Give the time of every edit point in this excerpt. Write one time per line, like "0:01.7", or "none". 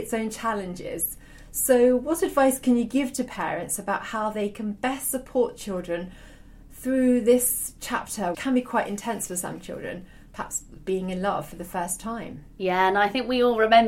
0:08.3